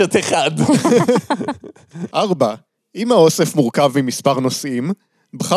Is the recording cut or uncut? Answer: uncut